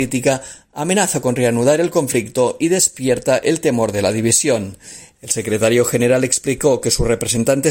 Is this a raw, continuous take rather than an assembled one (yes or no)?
yes